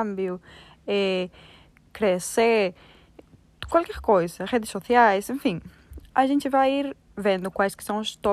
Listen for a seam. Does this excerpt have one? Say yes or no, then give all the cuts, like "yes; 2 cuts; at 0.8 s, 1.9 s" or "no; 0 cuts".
no; 0 cuts